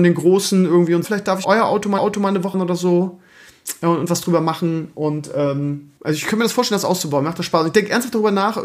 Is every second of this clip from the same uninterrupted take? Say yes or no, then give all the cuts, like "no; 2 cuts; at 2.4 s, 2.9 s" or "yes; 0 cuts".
no; 5 cuts; at 1.0 s, 1.4 s, 2.0 s, 2.5 s, 6.0 s